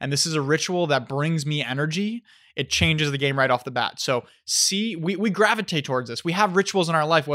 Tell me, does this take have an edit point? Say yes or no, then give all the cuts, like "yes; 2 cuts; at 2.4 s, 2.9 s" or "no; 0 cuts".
no; 0 cuts